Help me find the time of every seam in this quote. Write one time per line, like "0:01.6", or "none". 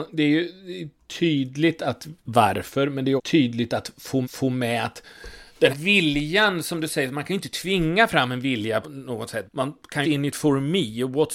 0:02.2
0:03.2
0:04.2
0:05.7
0:08.8
0:09.4
0:10.0